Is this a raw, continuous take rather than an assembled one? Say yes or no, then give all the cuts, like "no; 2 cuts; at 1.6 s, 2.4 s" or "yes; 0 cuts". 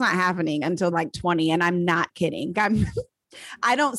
no; 2 cuts; at 0.9 s, 2.5 s